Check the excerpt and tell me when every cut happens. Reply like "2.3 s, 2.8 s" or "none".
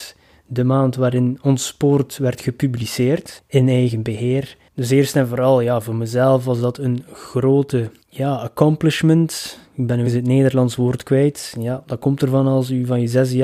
10.0 s